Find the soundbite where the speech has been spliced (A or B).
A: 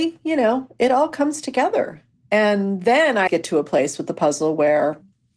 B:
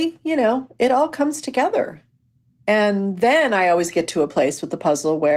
A